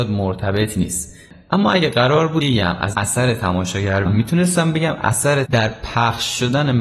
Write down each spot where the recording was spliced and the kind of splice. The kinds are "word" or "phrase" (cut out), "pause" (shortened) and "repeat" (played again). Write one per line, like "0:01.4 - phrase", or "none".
0:02.4 - word
0:02.9 - word
0:04.1 - word
0:05.4 - word